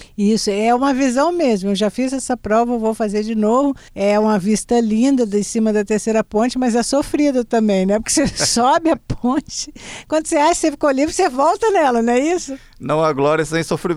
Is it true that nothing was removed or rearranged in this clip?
no; 1 cut; at 3.9 s

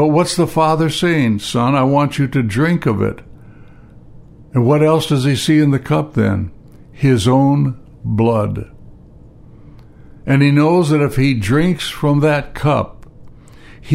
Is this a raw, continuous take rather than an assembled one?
yes; 0 cuts

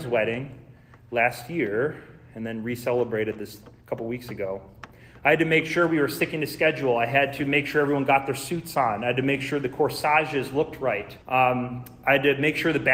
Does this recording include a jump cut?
yes; 1 cut; at 11.2 s

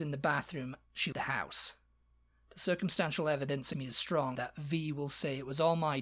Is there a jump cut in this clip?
yes; 3 cuts; at 1.1 s, 3.7 s, 4.4 s

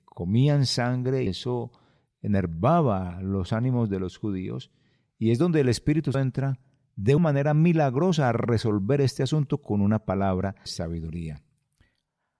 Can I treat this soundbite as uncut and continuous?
no; 4 cuts; at 1.3 s, 6.1 s, 7.2 s, 10.7 s

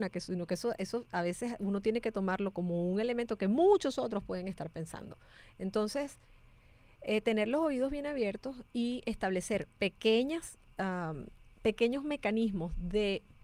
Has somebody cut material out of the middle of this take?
no; 0 cuts

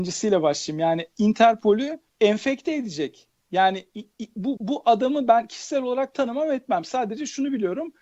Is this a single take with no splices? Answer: no; 2 cuts; at 2.1 s, 4.6 s

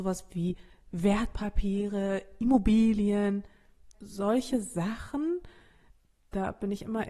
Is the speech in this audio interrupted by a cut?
yes; 1 cut; at 3.9 s

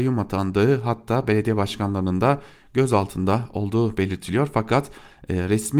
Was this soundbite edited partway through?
no; 0 cuts

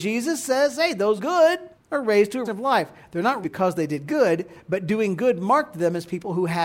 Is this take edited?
yes; 4 cuts; at 1.2 s, 1.7 s, 2.4 s, 3.4 s

